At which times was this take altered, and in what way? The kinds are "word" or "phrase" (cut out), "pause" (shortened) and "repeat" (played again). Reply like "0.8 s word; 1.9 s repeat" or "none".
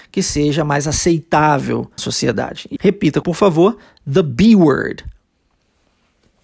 2.0 s word; 2.8 s word; 3.2 s word